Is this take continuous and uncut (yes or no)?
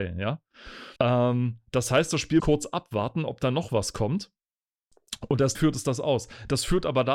no